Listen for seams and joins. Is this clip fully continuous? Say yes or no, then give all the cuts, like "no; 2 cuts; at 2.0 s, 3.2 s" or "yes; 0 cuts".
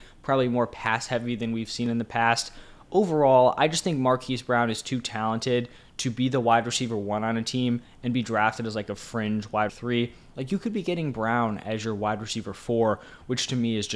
no; 1 cut; at 9.7 s